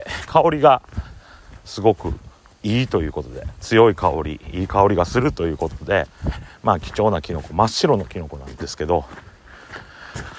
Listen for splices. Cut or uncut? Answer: cut